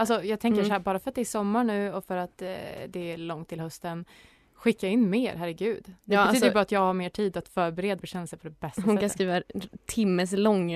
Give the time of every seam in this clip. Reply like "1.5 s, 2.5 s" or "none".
8.0 s